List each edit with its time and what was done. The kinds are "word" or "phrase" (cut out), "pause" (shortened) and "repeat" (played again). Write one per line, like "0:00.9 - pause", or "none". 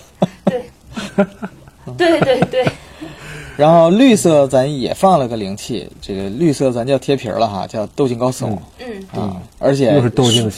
0:07.9 - pause
0:08.7 - pause
0:09.5 - pause

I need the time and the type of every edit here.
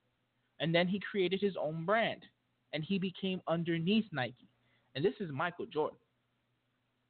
none

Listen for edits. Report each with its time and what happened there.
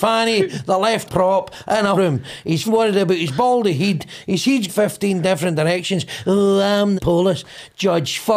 0:01.1 - word
0:02.0 - word
0:02.7 - word
0:04.7 - word
0:07.0 - word

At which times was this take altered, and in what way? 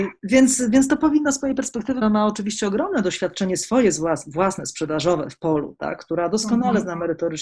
0:02.0 - phrase

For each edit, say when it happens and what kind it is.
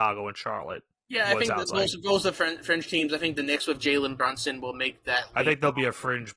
none

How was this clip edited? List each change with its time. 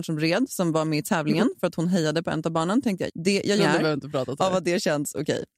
0:03.1 - word
0:03.6 - phrase

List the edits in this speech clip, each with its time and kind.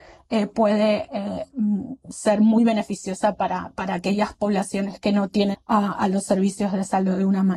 0:05.5 - word

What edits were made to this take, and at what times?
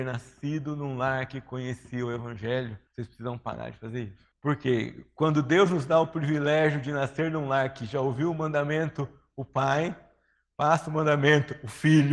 0:02.9 - pause
0:04.3 - pause

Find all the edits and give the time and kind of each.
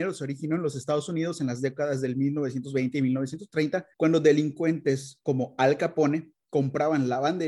0:03.9 - pause

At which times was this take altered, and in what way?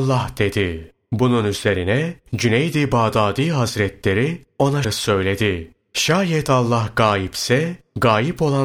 0:04.8 - word

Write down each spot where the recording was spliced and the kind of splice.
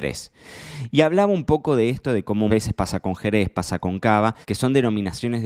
0:02.5 - word
0:04.4 - pause

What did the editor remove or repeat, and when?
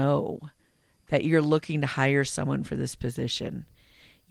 none

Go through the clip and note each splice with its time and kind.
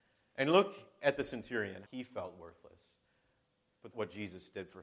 0:01.9 - word
0:03.9 - word

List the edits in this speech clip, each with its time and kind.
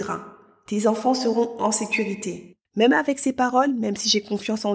0:02.6 - pause

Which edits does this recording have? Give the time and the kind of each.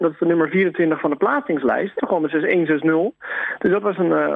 0:02.0 - phrase

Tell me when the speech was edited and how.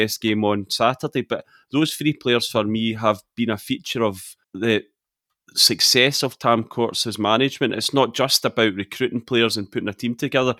0:04.4 - pause

